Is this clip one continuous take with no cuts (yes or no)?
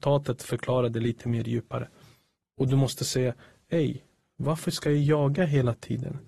yes